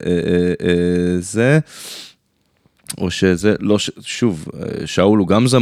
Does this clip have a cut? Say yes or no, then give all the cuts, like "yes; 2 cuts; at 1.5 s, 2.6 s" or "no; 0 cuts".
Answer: no; 0 cuts